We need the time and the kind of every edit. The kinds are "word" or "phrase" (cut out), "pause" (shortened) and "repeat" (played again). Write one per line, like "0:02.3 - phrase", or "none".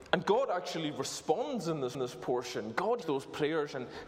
0:01.9 - repeat
0:03.0 - word

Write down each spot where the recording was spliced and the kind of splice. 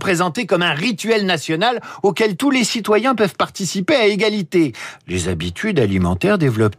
none

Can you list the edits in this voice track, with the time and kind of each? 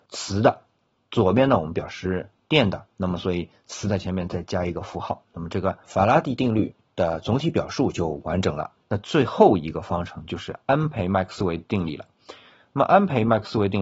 0:08.8 - pause

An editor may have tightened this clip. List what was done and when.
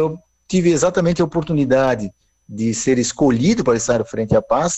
none

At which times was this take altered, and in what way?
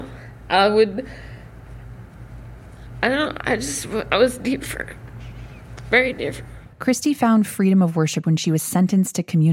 0:06.7 - pause
0:08.2 - word

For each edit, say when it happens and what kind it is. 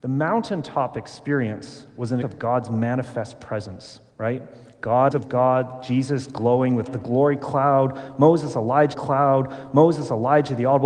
0:02.2 - word
0:04.1 - pause
0:05.1 - phrase
0:06.9 - word
0:08.9 - repeat

